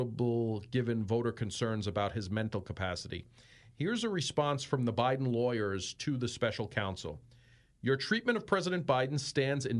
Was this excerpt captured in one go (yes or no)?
yes